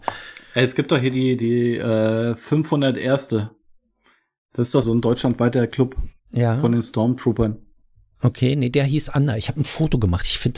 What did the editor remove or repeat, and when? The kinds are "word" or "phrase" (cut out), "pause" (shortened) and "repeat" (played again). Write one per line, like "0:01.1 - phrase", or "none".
0:04.8 - word
0:06.2 - pause